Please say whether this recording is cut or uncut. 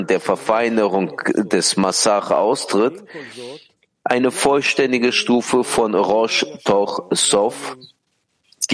uncut